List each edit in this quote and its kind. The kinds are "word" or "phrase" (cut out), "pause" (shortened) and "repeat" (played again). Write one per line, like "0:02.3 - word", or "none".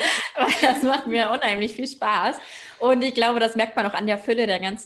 none